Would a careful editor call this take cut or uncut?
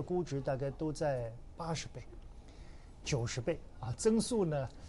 uncut